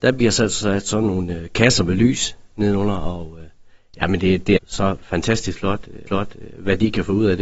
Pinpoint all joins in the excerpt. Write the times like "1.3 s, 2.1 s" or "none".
4.6 s, 6.1 s